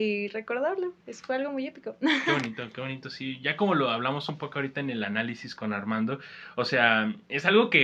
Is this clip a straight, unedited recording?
no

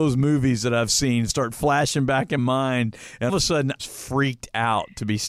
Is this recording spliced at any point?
yes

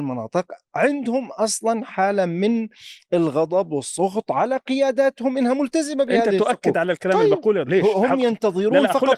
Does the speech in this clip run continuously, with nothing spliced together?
no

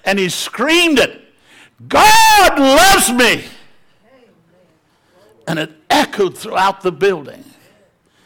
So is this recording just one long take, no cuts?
yes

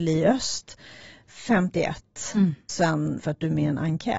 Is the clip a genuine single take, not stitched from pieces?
no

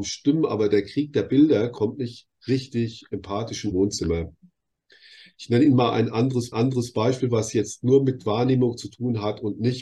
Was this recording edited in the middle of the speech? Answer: yes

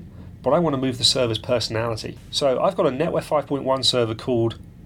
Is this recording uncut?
yes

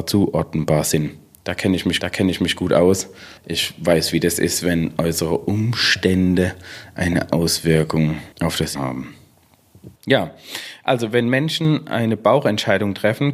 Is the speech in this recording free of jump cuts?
no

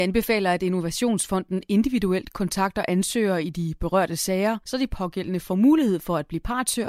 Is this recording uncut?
yes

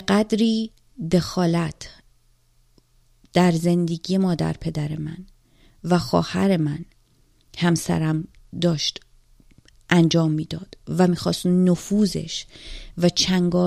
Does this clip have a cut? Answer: no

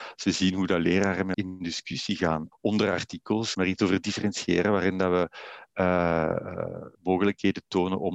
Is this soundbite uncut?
no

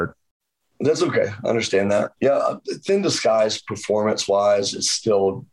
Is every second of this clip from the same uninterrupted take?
no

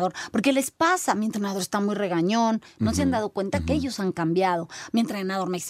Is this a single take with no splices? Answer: yes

